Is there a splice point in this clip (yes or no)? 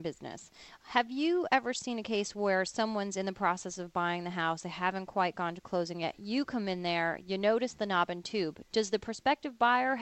no